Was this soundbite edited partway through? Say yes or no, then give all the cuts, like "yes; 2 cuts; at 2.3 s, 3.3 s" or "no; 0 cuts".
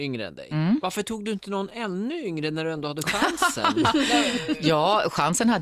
no; 0 cuts